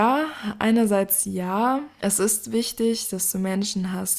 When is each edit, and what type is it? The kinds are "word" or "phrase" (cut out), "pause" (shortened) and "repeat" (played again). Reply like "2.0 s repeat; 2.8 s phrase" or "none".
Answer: none

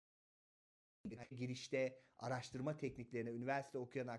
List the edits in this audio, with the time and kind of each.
1.3 s word

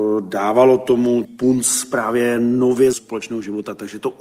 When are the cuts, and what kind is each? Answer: 1.2 s word; 2.9 s word

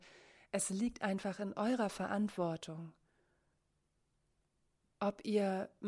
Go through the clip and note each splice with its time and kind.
none

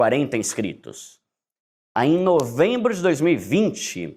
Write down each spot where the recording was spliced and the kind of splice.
none

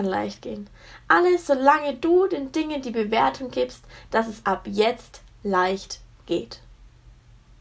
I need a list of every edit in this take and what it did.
4.4 s word

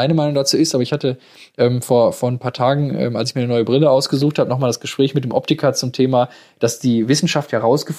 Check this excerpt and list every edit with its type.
none

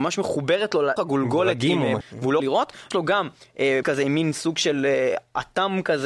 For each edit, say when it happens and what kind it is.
1.0 s word; 2.0 s word; 2.4 s word; 2.9 s word; 3.8 s word

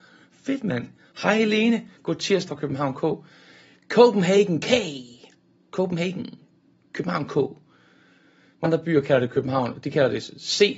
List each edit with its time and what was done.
2.5 s word; 8.6 s word

